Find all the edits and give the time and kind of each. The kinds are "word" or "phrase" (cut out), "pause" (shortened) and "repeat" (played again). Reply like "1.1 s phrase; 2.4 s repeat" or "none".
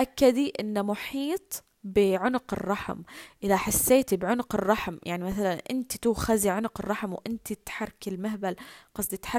none